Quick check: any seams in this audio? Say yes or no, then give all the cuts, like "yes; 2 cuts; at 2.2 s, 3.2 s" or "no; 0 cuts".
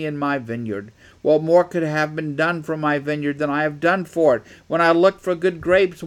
no; 0 cuts